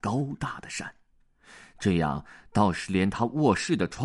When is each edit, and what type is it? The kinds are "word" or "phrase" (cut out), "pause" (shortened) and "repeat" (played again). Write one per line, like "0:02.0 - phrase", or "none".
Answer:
none

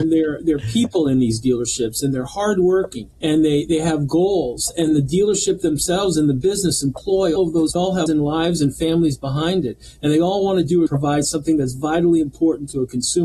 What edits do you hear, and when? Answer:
0:03.1 - pause
0:07.4 - word
0:07.8 - phrase
0:08.1 - word
0:10.9 - phrase

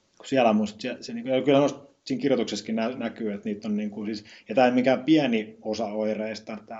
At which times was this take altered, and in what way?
none

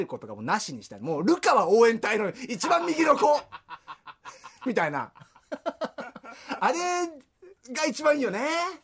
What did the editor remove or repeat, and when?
0:07.6 - pause

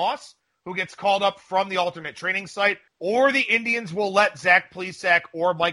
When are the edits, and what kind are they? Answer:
0:02.9 - pause

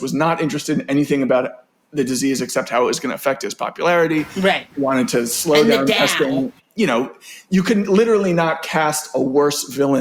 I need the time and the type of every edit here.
none

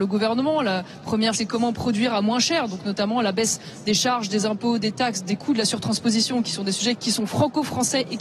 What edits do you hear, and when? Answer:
0:01.3 - word

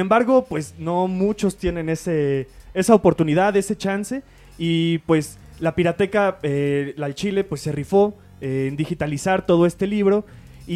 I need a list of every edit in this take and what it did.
none

